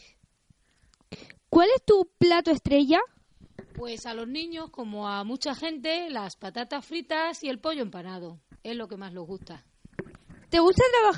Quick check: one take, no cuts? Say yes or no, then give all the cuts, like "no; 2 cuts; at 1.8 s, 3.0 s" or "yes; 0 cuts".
yes; 0 cuts